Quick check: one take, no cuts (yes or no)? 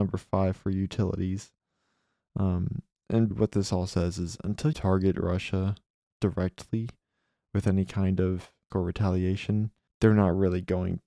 no